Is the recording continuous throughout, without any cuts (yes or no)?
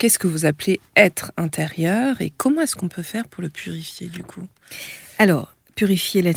yes